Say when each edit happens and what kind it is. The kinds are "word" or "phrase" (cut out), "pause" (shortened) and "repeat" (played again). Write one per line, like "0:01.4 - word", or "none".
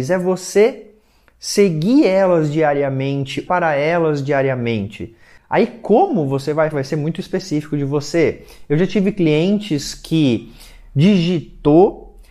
0:03.5 - word
0:06.7 - word